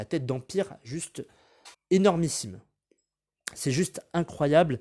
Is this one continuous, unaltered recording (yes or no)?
no